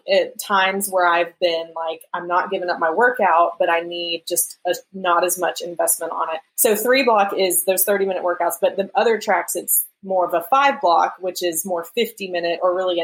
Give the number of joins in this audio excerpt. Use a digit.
1